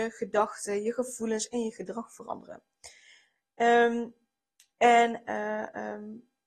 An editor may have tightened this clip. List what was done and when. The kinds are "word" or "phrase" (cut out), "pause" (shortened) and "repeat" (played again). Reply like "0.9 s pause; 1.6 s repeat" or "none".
none